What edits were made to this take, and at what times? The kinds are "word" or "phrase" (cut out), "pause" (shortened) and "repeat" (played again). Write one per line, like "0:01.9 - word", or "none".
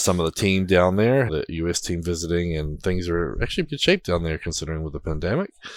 0:01.3 - phrase
0:03.7 - word